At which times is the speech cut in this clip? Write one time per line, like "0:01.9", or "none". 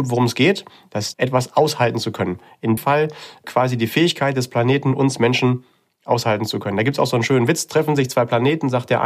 0:01.1
0:02.8